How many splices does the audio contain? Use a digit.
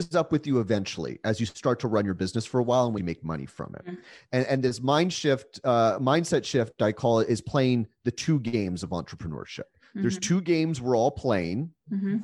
1